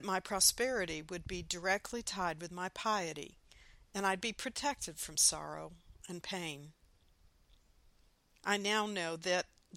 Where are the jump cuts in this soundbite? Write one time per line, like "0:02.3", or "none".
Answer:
none